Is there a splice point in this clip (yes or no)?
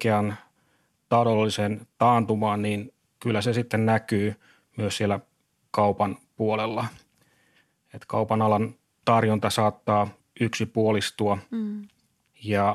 no